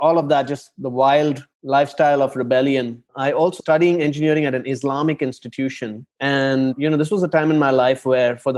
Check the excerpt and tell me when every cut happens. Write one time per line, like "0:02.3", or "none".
0:01.5
0:03.1
0:03.6
0:06.1